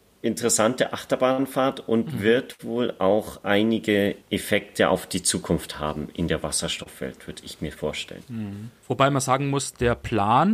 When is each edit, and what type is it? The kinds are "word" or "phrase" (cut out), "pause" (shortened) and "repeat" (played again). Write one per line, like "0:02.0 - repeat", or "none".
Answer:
0:04.2 - pause